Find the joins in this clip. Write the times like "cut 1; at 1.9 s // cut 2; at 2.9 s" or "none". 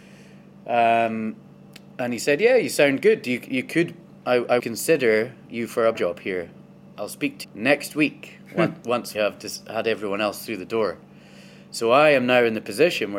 cut 1; at 4.6 s // cut 2; at 5.9 s // cut 3; at 7.4 s // cut 4; at 9.1 s